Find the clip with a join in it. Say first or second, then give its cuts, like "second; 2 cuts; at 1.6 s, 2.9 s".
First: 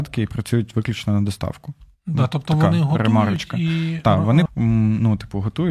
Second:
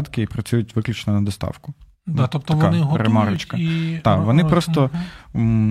first; 1 cut; at 4.5 s